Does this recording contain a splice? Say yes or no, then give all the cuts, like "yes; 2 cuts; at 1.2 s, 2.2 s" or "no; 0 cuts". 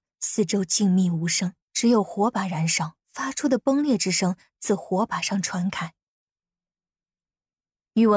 yes; 2 cuts; at 1.6 s, 3.0 s